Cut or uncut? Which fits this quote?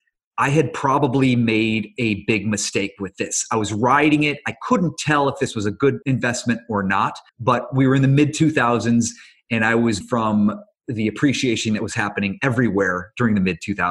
cut